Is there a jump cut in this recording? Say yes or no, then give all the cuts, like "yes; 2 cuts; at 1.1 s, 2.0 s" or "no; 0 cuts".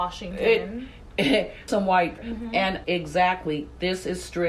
yes; 3 cuts; at 1.7 s, 2.2 s, 2.8 s